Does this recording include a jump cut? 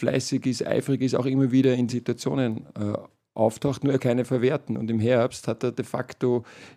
yes; 2 cuts; at 1.9 s, 4.0 s

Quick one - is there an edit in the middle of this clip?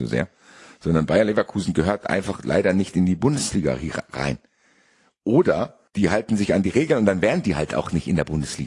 yes; 1 cut; at 5.9 s

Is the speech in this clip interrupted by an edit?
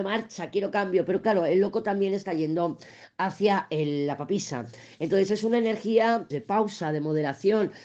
yes; 1 cut; at 6.3 s

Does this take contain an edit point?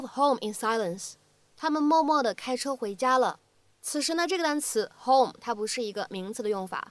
no; 0 cuts

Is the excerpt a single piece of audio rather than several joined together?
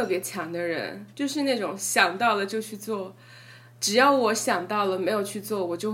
no; 1 cut; at 1.1 s

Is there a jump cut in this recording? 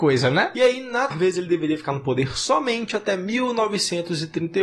yes; 1 cut; at 1.1 s

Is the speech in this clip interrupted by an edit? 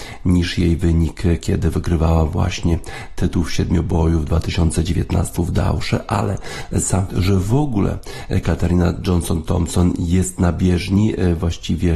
yes; 2 cuts; at 5.4 s, 7.1 s

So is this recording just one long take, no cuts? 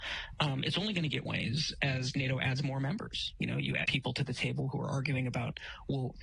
no; 2 cuts; at 1.3 s, 3.8 s

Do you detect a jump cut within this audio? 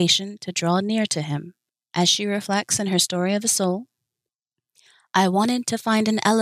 yes; 1 cut; at 1.7 s

